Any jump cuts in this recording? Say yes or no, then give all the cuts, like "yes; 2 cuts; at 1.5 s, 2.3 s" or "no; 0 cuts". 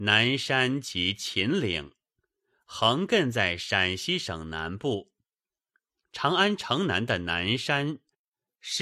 no; 0 cuts